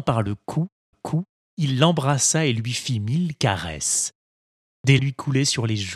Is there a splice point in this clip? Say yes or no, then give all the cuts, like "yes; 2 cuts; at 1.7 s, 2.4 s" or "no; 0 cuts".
yes; 2 cuts; at 0.9 s, 5.0 s